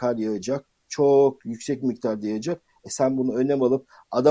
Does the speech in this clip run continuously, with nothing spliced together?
yes; 0 cuts

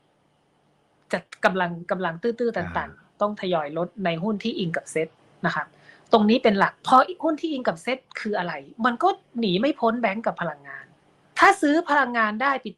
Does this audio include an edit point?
no; 0 cuts

